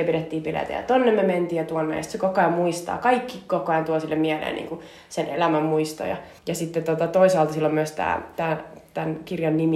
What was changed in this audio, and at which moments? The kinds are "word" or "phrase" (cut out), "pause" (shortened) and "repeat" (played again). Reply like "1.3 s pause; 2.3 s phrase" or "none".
6.4 s pause